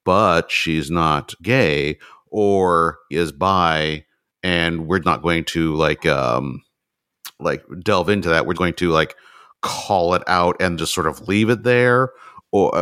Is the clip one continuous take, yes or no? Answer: no